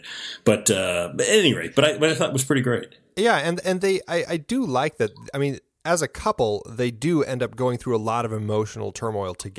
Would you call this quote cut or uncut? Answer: uncut